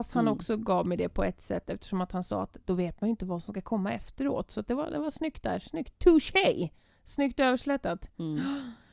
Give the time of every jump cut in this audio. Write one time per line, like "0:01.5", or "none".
none